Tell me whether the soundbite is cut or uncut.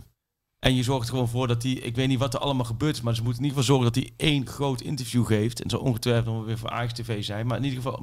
uncut